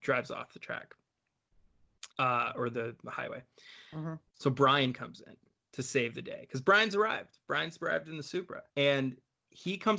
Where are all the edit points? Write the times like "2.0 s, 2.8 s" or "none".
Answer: 2.1 s, 4.3 s, 8.7 s